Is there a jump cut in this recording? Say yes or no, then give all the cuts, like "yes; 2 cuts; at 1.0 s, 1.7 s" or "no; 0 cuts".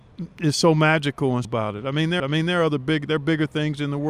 yes; 2 cuts; at 1.4 s, 2.2 s